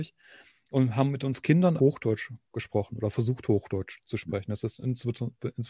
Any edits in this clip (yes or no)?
yes